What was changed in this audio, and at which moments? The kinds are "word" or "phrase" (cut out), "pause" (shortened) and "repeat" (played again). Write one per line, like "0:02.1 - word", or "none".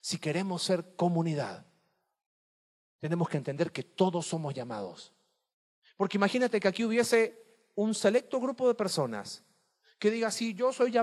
none